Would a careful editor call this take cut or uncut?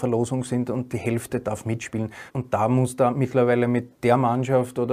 cut